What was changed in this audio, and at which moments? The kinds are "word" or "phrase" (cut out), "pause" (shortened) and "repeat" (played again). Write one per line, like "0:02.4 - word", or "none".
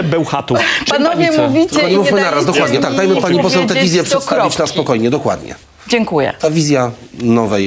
none